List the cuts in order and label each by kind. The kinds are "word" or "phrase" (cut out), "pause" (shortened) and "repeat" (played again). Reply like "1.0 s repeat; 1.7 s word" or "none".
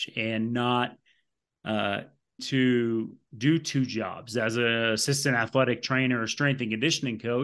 2.4 s phrase